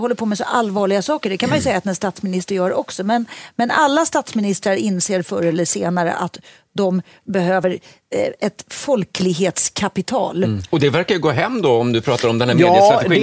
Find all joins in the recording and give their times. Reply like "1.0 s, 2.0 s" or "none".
none

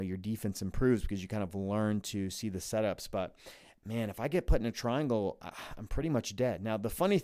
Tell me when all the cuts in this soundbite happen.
none

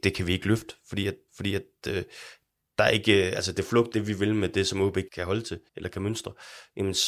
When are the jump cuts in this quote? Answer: 1.3 s, 3.9 s, 5.1 s, 5.7 s

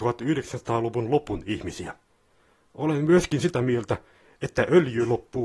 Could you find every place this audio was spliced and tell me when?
none

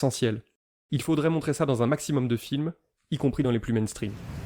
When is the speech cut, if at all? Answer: none

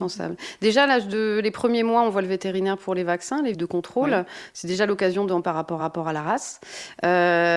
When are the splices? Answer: 3.5 s, 5.4 s, 5.8 s

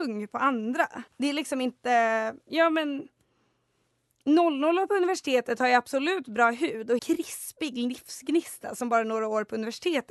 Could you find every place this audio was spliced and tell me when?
1.1 s, 2.4 s, 7.0 s

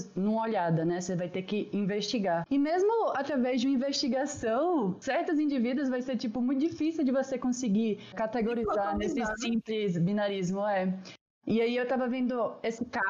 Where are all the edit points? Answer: 8.1 s

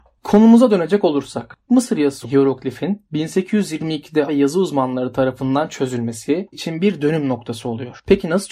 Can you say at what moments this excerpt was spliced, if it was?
1.7 s, 2.2 s, 4.3 s, 6.5 s

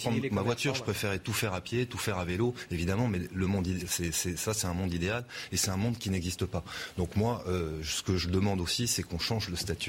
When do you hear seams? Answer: none

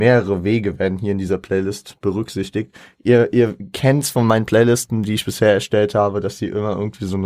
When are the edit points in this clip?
none

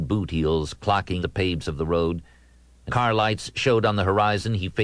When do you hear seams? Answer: 1.2 s, 1.6 s, 2.9 s

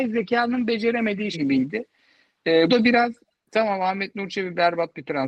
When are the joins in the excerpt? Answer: 1.3 s, 2.7 s

